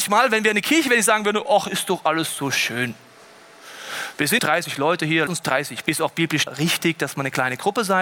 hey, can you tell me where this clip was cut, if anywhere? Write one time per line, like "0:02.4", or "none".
0:04.4
0:05.3
0:05.8
0:06.5